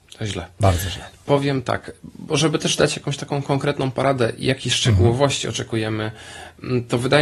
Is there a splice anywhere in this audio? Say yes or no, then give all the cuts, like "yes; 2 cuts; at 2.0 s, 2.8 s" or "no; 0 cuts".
no; 0 cuts